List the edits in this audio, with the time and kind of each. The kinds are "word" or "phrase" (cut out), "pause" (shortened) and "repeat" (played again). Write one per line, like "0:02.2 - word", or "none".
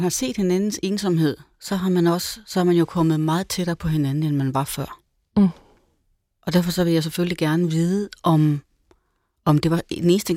none